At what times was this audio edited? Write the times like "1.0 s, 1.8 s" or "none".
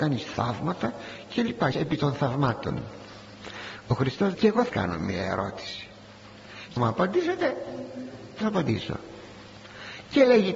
1.7 s, 4.3 s, 4.7 s, 6.8 s, 8.4 s